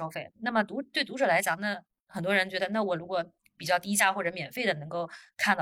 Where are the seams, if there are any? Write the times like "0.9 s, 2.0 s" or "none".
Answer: none